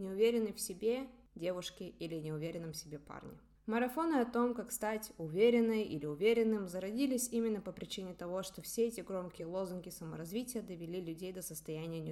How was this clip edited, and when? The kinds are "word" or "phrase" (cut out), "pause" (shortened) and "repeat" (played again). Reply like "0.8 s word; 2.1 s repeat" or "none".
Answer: none